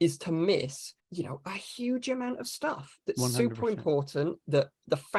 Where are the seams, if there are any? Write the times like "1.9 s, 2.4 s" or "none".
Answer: 1.0 s